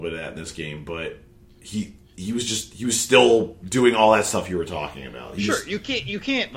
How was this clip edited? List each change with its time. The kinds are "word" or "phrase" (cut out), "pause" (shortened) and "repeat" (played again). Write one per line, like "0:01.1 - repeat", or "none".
none